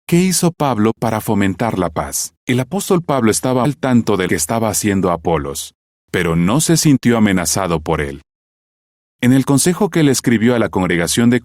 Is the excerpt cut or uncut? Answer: cut